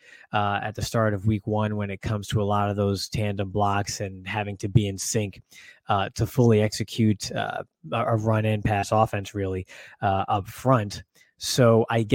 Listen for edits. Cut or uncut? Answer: uncut